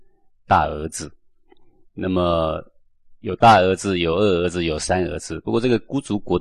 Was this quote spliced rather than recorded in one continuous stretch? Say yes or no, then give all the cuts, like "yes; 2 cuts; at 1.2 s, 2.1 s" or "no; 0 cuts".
no; 0 cuts